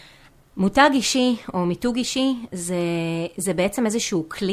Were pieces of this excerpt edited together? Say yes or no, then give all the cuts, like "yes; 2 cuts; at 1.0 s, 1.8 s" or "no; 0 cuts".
no; 0 cuts